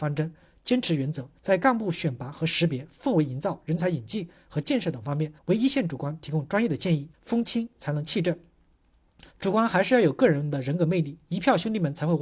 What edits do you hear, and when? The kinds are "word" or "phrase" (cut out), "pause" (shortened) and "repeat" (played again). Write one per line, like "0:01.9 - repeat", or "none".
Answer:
0:01.4 - pause
0:05.4 - pause
0:07.1 - pause
0:09.3 - pause